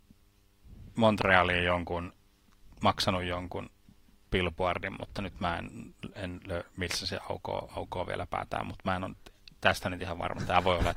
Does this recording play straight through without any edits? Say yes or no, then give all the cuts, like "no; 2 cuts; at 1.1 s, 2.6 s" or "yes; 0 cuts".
yes; 0 cuts